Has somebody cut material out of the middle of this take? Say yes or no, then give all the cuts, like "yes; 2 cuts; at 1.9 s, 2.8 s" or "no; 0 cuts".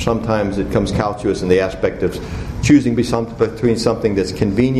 no; 0 cuts